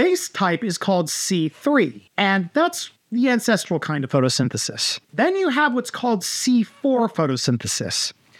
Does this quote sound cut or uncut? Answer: cut